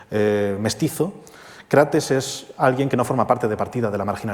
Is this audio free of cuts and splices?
yes; 0 cuts

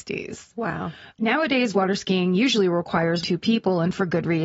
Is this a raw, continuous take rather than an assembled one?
no; 1 cut; at 3.2 s

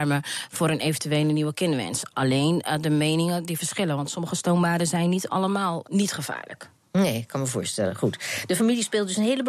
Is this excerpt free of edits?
no; 1 cut; at 5.8 s

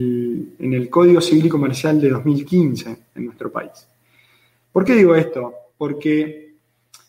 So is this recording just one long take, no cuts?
yes; 0 cuts

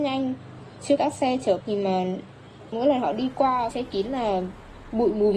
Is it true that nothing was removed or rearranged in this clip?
no; 4 cuts; at 1.0 s, 1.6 s, 2.7 s, 3.7 s

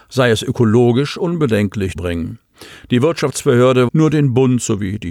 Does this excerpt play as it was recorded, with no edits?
no; 2 cuts; at 2.0 s, 3.9 s

